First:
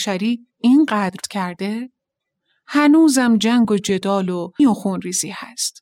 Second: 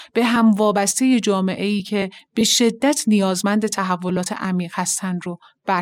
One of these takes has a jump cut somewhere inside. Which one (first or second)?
first